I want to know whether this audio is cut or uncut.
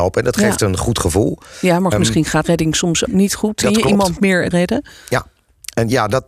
cut